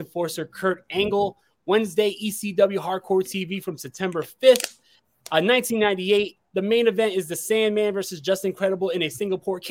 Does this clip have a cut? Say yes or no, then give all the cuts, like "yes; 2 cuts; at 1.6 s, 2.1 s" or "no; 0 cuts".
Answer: no; 0 cuts